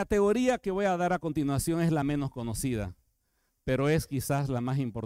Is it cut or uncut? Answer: uncut